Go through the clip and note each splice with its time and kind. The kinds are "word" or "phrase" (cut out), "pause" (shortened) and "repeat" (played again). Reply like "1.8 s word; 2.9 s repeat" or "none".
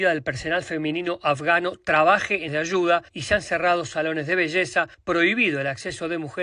2.5 s word; 3.1 s pause